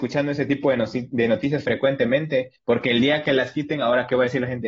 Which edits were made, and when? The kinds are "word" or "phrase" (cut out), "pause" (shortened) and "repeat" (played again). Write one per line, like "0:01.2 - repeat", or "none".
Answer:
none

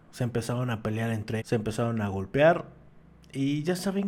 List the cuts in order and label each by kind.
0:01.4 - word

